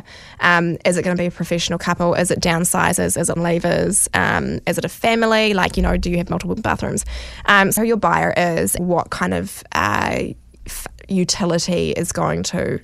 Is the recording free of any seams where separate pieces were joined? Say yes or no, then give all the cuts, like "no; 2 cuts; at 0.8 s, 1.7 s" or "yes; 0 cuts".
no; 4 cuts; at 3.4 s, 6.6 s, 7.8 s, 8.8 s